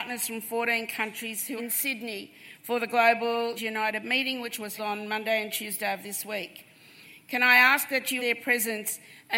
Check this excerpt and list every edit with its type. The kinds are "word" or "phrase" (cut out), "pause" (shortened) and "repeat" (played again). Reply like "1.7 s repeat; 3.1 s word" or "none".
1.6 s word; 3.6 s word; 4.8 s word; 8.2 s word